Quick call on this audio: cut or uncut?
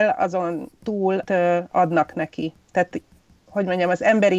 cut